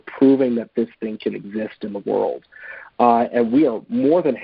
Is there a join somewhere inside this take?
no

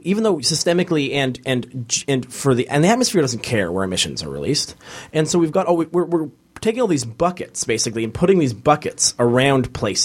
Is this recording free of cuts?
yes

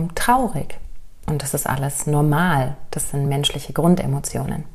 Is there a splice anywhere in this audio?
no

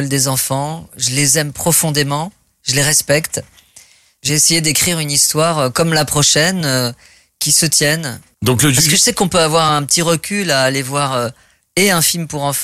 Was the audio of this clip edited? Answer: no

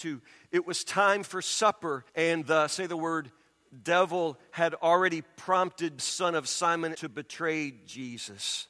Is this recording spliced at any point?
yes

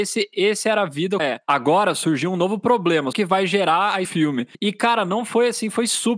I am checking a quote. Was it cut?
yes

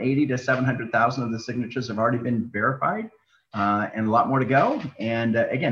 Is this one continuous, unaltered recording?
yes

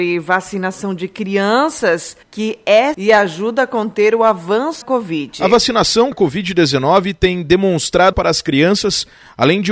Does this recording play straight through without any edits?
no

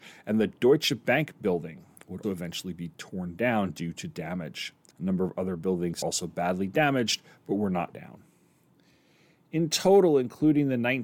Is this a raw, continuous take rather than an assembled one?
no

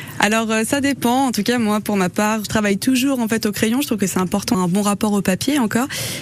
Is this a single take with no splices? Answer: no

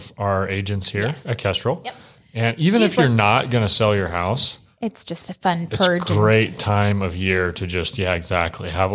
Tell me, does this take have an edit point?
no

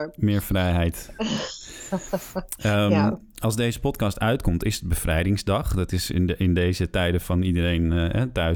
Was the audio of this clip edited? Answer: no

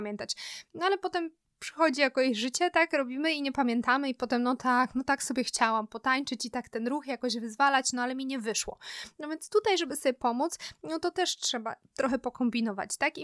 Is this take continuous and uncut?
yes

